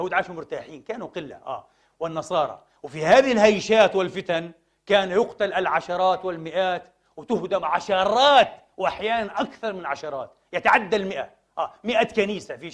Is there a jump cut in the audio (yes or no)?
no